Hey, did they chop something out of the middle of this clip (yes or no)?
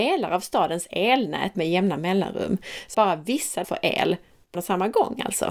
yes